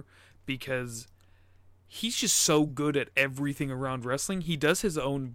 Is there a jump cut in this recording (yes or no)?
no